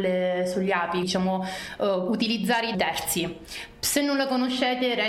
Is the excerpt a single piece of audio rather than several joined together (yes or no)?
no